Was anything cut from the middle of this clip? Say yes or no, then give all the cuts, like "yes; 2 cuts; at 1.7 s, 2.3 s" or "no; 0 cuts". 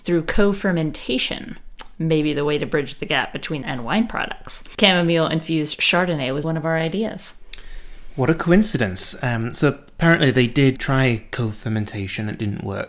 yes; 3 cuts; at 3.6 s, 6.4 s, 10.8 s